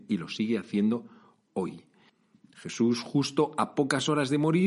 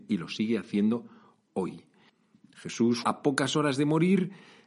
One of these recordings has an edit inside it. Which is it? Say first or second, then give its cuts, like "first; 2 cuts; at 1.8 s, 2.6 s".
second; 1 cut; at 3.0 s